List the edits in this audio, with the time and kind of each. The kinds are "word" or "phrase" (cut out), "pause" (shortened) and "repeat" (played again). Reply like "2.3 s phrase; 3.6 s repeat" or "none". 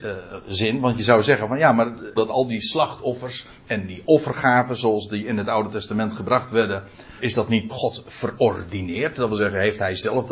2.2 s phrase; 7.2 s word; 7.7 s word